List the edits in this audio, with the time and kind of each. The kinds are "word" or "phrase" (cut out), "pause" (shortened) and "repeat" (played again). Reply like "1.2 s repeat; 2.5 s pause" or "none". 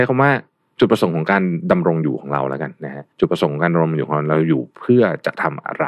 3.1 s pause